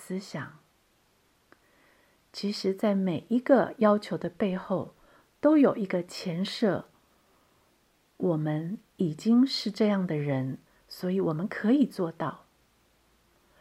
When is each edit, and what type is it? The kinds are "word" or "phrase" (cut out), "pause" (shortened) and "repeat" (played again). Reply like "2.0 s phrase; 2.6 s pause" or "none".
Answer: 10.7 s pause